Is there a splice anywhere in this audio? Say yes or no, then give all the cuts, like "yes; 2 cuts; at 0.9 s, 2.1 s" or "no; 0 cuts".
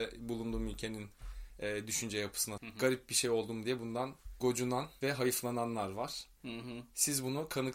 yes; 1 cut; at 2.6 s